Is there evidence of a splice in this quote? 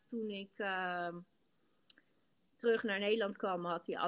no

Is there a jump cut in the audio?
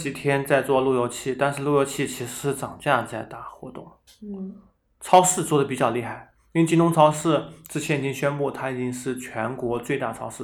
no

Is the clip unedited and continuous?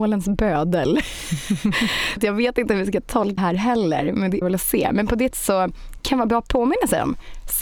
no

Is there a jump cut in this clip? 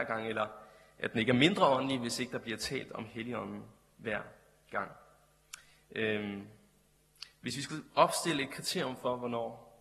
no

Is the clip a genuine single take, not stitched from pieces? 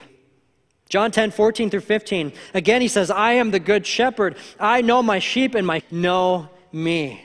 no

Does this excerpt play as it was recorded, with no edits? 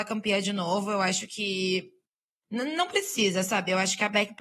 yes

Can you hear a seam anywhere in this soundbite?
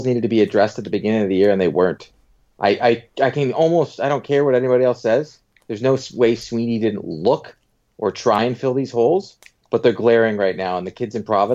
no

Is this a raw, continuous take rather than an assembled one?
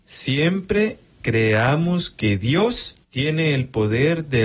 no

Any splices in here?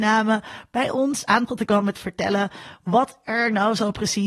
yes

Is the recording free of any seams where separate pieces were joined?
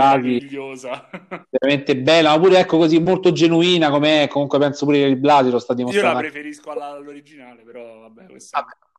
no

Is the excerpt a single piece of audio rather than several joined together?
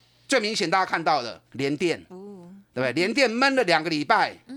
no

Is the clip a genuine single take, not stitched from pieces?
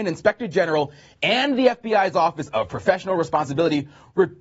yes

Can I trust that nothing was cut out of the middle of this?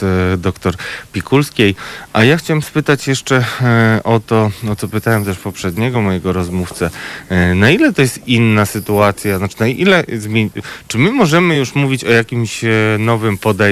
yes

